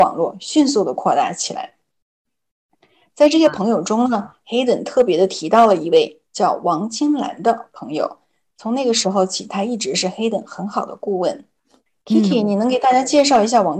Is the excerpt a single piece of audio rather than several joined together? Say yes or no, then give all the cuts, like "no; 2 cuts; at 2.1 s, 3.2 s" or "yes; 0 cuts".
no; 1 cut; at 6.2 s